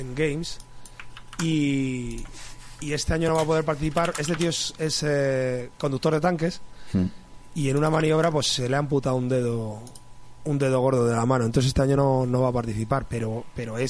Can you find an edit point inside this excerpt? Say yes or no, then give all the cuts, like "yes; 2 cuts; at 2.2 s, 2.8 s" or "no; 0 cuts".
no; 0 cuts